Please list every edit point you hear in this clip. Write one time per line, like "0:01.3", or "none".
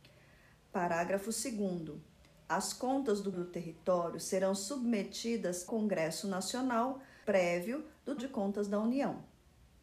0:03.3
0:05.7
0:07.2
0:08.2